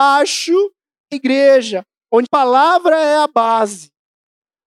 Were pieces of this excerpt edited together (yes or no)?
yes